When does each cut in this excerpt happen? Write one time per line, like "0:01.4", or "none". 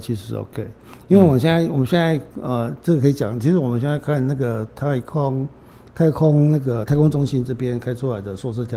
0:02.3